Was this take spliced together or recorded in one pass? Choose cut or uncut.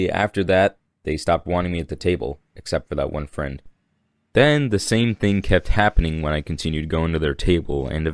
uncut